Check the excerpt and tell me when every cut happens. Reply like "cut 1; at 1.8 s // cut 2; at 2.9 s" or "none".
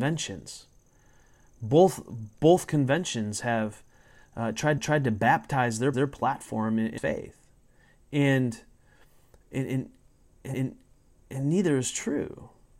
cut 1; at 4.8 s // cut 2; at 5.9 s // cut 3; at 7.0 s // cut 4; at 10.5 s